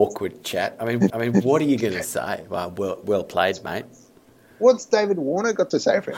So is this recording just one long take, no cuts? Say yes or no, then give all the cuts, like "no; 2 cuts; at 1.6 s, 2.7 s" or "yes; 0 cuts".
no; 1 cut; at 1.1 s